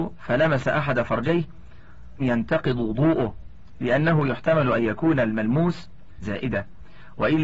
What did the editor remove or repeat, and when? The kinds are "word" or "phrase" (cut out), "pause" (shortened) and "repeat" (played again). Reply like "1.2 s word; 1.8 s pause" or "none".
2.2 s word; 6.2 s word